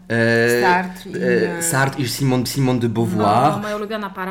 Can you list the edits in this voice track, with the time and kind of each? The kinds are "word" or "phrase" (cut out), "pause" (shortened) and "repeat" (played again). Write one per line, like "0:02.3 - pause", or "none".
0:02.5 - repeat